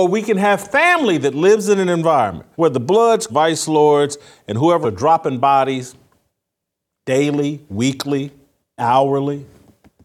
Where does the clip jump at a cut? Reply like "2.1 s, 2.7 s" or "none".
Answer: 2.5 s, 3.3 s, 4.8 s, 8.8 s